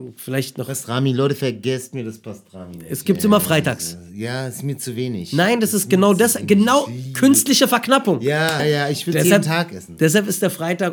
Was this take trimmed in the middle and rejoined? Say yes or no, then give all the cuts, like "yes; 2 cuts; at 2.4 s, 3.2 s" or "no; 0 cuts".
yes; 1 cut; at 8.6 s